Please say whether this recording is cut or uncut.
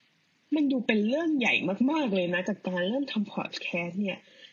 uncut